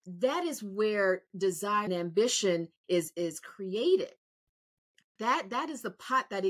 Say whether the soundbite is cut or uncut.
cut